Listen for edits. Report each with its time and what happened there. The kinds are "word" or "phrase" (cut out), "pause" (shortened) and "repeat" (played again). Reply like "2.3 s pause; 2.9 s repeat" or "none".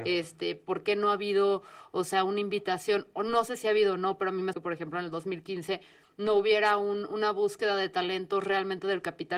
4.5 s word

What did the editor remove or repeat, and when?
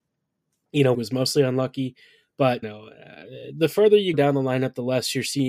0.9 s word; 2.6 s word; 4.1 s word

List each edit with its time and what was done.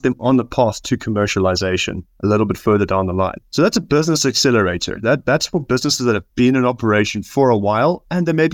3.5 s pause

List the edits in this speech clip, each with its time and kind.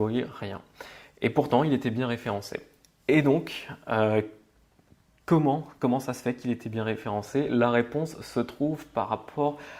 none

